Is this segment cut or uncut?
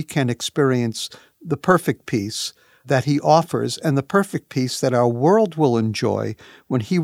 uncut